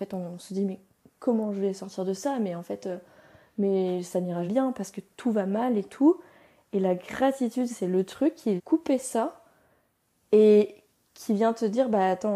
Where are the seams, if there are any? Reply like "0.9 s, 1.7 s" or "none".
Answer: 4.5 s, 8.6 s